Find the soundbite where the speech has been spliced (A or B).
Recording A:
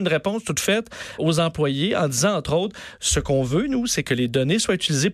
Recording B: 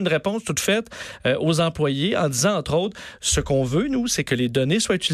A